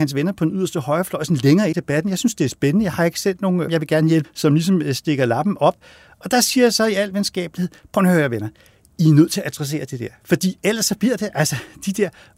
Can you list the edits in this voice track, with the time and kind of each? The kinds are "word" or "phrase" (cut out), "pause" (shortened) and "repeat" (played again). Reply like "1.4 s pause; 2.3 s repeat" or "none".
1.7 s phrase; 3.7 s word; 4.2 s word